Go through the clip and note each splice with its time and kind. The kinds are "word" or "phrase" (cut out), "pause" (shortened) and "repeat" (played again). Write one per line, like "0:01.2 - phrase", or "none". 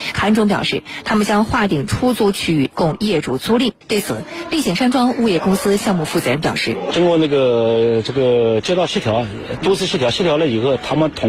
0:03.8 - pause